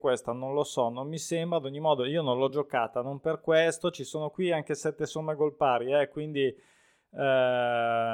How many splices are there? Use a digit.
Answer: 0